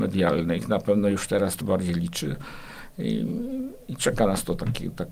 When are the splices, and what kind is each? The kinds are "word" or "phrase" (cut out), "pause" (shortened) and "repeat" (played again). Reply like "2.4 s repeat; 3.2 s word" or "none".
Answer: 1.6 s word